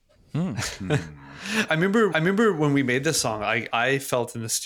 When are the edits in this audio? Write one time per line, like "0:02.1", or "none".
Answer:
0:01.7
0:02.1
0:03.7